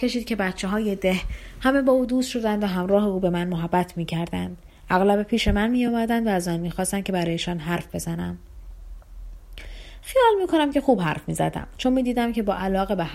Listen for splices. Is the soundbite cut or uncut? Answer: uncut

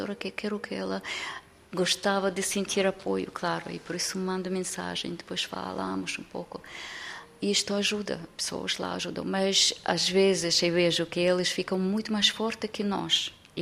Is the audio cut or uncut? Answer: uncut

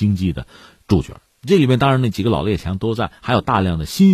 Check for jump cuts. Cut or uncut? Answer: cut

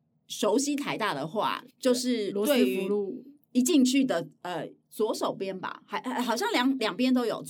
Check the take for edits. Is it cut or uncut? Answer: cut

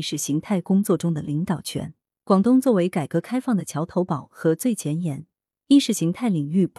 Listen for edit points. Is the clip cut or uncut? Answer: uncut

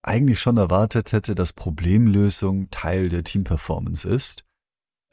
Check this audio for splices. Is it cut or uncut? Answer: uncut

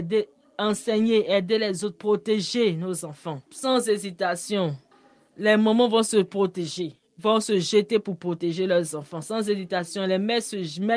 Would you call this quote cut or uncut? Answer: cut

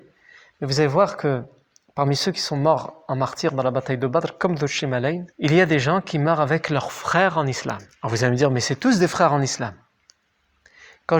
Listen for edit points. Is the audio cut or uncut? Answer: cut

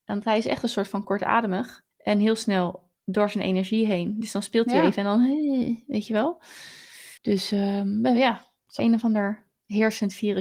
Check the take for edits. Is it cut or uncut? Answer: cut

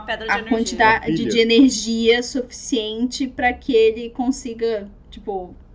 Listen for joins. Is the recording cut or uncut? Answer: uncut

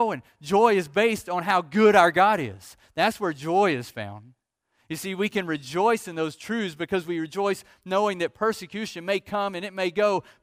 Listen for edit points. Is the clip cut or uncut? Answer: uncut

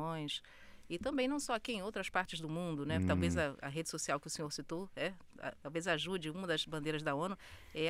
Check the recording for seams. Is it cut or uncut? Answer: cut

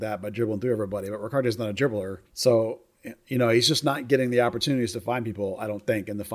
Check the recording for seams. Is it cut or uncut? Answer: cut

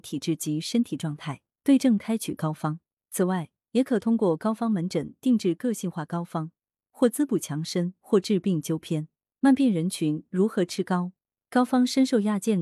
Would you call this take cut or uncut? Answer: uncut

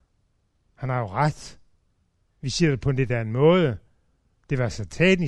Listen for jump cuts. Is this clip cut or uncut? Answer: uncut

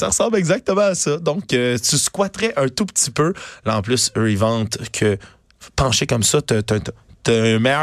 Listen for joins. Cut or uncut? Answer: uncut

